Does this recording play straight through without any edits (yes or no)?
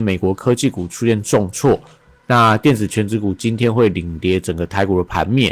yes